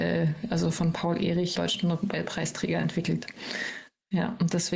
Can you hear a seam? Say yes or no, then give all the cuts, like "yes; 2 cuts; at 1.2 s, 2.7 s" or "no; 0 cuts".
yes; 1 cut; at 1.6 s